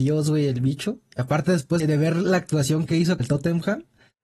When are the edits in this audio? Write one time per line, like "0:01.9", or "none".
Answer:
0:01.8
0:03.2